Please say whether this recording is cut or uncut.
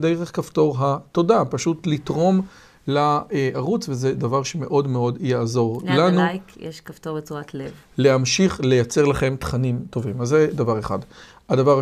uncut